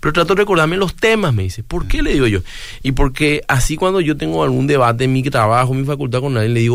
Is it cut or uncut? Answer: uncut